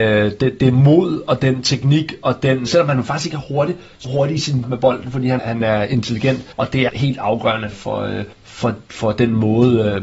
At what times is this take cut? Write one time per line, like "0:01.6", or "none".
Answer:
0:02.7
0:04.0
0:04.6
0:05.4
0:06.5
0:06.9
0:07.7
0:08.3